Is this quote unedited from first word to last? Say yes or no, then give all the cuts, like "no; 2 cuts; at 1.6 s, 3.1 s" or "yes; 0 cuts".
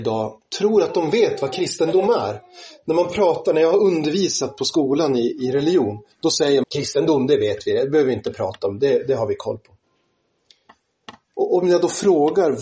no; 2 cuts; at 6.1 s, 6.6 s